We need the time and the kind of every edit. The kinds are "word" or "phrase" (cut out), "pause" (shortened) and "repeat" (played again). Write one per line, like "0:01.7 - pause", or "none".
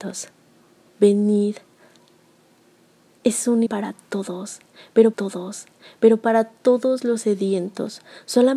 0:03.7 - word
0:05.1 - repeat